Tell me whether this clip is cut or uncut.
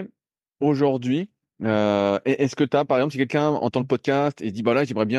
uncut